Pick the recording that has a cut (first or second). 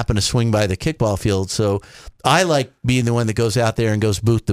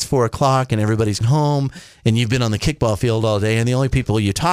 second